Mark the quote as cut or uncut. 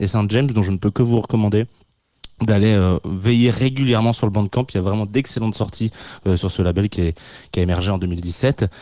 uncut